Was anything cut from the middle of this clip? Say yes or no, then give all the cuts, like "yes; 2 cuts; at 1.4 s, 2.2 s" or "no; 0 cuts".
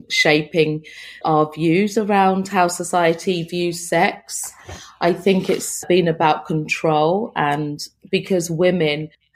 yes; 1 cut; at 1.2 s